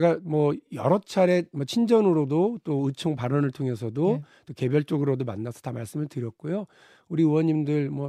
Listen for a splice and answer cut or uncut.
uncut